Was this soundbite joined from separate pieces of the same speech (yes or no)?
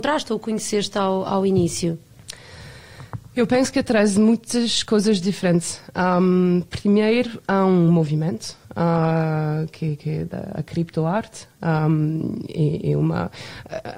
yes